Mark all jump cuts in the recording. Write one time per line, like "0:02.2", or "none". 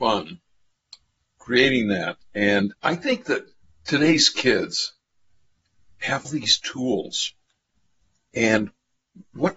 0:02.8
0:03.6
0:06.2